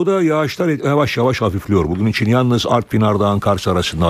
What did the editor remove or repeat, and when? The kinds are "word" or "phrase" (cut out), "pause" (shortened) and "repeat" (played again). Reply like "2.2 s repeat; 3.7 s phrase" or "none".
none